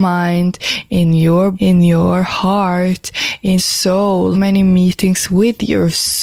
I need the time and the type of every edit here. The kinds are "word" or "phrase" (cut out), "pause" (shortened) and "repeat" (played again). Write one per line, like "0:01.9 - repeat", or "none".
0:01.5 - word
0:03.6 - word
0:04.3 - word